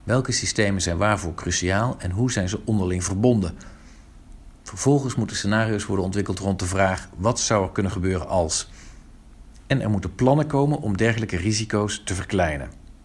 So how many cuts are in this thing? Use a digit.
0